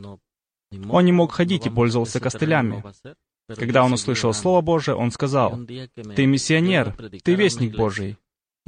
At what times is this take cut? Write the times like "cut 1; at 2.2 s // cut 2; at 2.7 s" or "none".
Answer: none